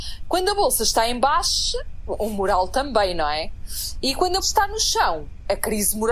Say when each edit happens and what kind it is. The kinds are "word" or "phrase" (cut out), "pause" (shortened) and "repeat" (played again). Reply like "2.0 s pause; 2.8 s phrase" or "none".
4.4 s word